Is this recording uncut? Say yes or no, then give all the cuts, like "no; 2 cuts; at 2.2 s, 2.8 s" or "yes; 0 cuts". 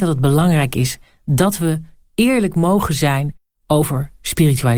yes; 0 cuts